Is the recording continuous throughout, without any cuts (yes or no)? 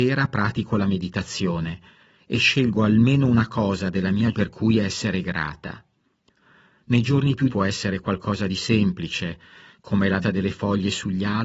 no